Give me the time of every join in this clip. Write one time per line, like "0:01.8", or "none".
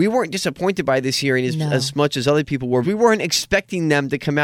0:02.8